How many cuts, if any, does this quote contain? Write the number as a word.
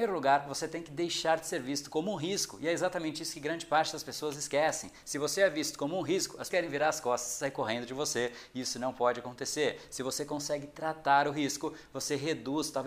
one